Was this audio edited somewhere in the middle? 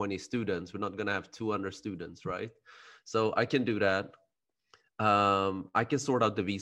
no; 0 cuts

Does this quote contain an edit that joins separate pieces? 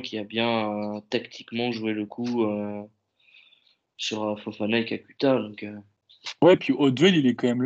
no; 0 cuts

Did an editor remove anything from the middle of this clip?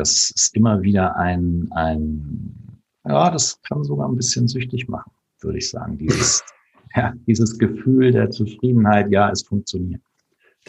yes; 1 cut; at 2.8 s

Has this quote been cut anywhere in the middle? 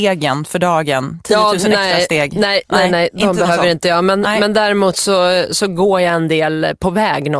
no; 0 cuts

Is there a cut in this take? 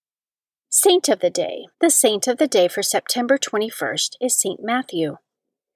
yes; 1 cut; at 1.7 s

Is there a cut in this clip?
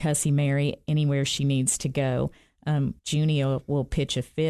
yes; 1 cut; at 3.0 s

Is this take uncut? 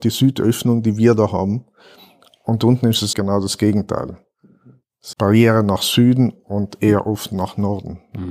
no; 2 cuts; at 3.1 s, 5.1 s

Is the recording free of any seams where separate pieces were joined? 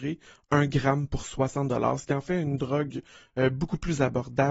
yes; 0 cuts

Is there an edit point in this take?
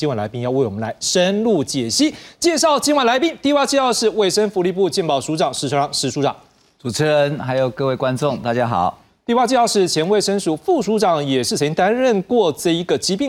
no; 0 cuts

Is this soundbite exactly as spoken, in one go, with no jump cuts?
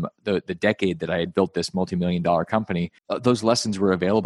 no; 1 cut; at 3.0 s

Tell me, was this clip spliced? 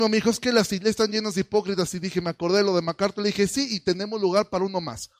no; 0 cuts

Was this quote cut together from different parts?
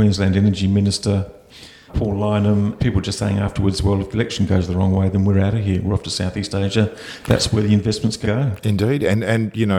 yes; 3 cuts; at 1.9 s, 2.8 s, 8.2 s

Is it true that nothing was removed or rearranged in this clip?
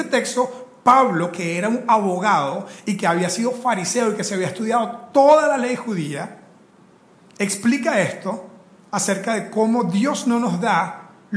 yes; 0 cuts

